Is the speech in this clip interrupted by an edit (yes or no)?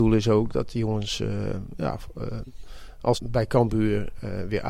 yes